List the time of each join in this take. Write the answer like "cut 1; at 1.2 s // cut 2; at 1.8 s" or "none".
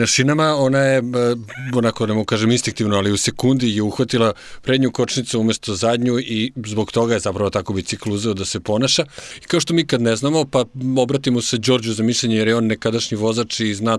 none